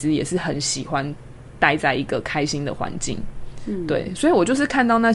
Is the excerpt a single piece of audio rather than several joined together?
yes; 0 cuts

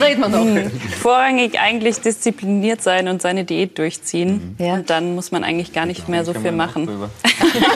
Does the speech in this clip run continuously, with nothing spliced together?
yes; 0 cuts

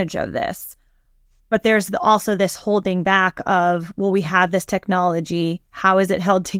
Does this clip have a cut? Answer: no; 0 cuts

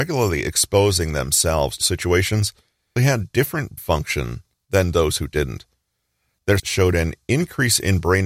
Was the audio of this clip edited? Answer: yes; 4 cuts; at 1.8 s, 3.0 s, 3.8 s, 6.6 s

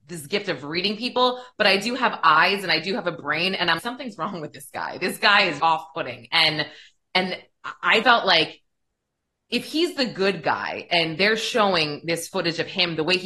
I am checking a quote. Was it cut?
yes; 3 cuts; at 3.8 s, 5.6 s, 8.0 s

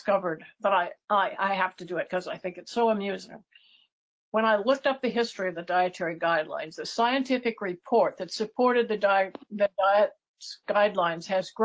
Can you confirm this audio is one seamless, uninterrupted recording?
yes; 0 cuts

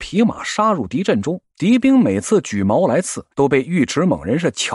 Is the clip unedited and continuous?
no; 2 cuts; at 1.5 s, 3.3 s

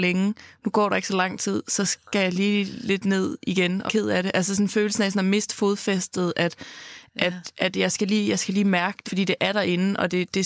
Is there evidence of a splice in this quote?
yes; 2 cuts; at 3.9 s, 9.1 s

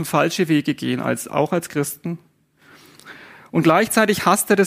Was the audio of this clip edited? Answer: no; 0 cuts

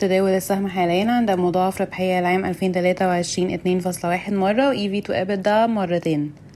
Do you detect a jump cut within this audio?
no; 0 cuts

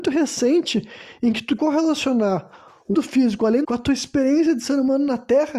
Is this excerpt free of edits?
no; 3 cuts; at 1.6 s, 2.9 s, 3.6 s

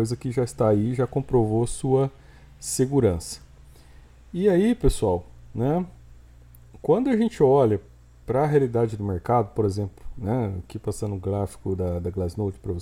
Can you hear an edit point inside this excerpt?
no; 0 cuts

